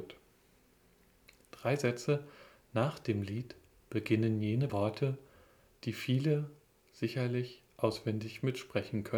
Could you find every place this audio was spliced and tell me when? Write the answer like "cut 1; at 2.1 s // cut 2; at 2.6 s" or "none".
cut 1; at 4.7 s